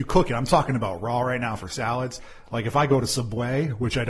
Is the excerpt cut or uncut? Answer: uncut